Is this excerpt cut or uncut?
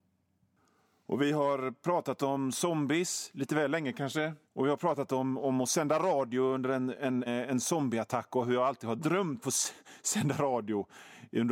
cut